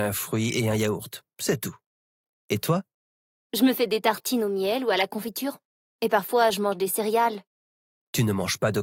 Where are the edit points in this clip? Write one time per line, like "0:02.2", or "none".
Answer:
none